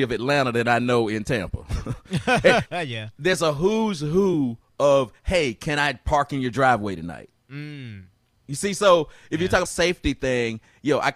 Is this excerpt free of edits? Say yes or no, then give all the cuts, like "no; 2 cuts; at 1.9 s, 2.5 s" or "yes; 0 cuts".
no; 3 cuts; at 2.7 s, 7.4 s, 9.7 s